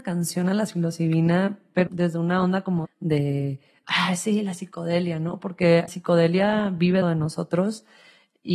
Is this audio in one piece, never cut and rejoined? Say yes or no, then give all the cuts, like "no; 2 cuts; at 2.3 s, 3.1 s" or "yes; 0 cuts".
no; 4 cuts; at 1.9 s, 2.8 s, 5.9 s, 7.0 s